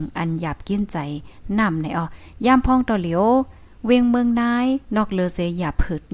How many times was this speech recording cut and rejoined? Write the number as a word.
one